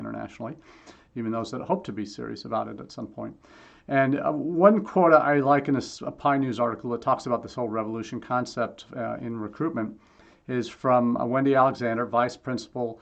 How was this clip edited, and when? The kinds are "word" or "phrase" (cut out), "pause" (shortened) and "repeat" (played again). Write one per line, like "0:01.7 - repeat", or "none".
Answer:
none